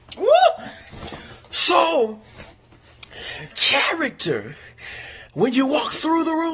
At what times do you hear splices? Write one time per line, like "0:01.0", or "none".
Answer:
0:03.5
0:05.3